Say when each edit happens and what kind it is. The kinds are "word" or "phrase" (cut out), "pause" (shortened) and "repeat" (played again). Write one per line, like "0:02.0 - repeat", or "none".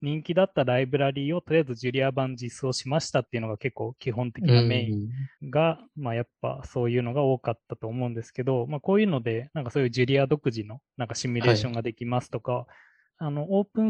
0:05.3 - pause